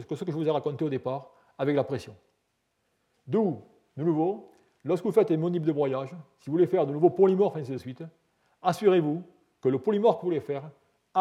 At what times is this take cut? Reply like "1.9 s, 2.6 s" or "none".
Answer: none